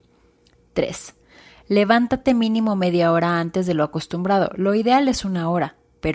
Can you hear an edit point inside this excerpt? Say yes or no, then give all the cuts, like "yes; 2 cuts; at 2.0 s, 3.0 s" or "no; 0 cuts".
no; 0 cuts